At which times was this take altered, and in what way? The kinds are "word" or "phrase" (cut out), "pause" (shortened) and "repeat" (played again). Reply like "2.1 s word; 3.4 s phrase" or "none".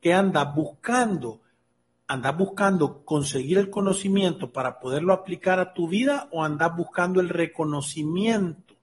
none